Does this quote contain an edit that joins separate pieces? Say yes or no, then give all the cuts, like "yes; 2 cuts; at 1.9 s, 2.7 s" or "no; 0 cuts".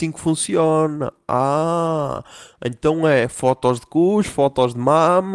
no; 0 cuts